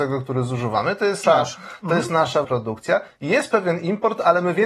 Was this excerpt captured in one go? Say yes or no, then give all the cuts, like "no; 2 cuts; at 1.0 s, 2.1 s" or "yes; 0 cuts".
no; 2 cuts; at 1.2 s, 2.4 s